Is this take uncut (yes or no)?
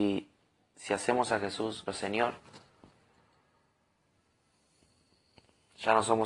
no